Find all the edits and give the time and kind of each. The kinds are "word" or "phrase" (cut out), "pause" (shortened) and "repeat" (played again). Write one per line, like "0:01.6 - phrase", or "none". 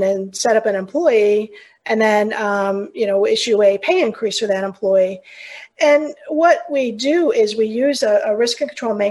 none